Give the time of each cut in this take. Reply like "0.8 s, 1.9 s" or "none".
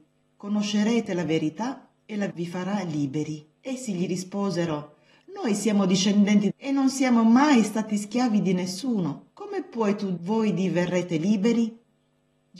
2.0 s, 2.3 s, 3.6 s, 6.5 s, 9.3 s, 10.2 s